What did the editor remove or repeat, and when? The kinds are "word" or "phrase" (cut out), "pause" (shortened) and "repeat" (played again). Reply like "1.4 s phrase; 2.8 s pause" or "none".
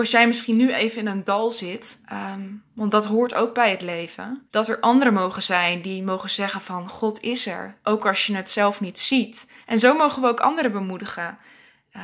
2.0 s pause; 4.5 s pause; 9.6 s pause